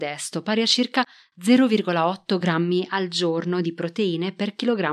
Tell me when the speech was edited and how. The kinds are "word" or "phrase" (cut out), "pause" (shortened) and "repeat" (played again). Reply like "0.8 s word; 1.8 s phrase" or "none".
none